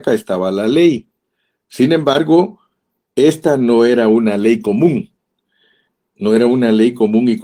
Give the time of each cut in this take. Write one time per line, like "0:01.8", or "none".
none